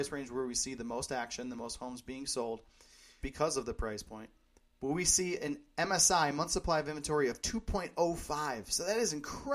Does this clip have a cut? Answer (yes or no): yes